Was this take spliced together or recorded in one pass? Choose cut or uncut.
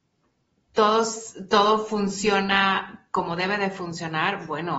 uncut